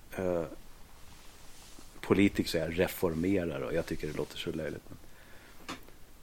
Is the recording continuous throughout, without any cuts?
no; 1 cut; at 2.5 s

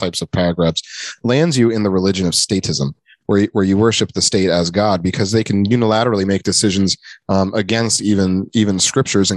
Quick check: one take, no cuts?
yes; 0 cuts

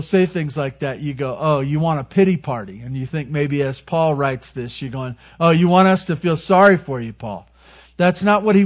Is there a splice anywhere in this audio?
no; 0 cuts

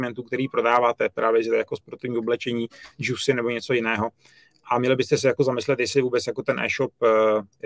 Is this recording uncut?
yes; 0 cuts

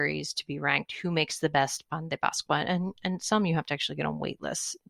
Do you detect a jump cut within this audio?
no; 0 cuts

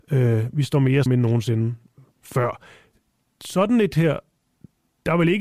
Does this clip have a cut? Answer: yes; 2 cuts; at 1.1 s, 3.9 s

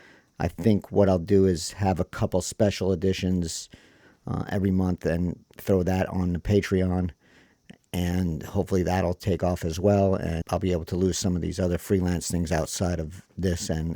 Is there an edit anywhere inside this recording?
yes; 1 cut; at 10.4 s

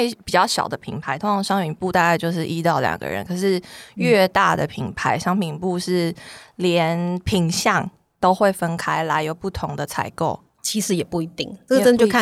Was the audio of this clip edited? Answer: no; 0 cuts

